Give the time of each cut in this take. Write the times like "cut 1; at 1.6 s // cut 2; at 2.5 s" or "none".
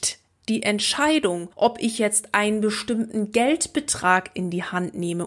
cut 1; at 1.5 s